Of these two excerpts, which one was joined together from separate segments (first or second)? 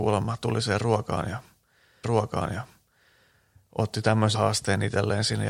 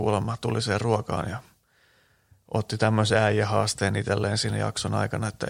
first